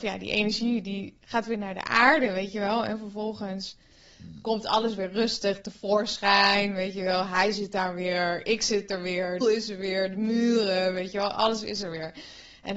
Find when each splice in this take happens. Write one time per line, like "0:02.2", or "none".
0:09.4